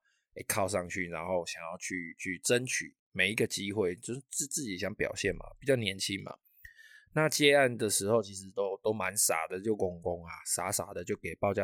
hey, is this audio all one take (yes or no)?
yes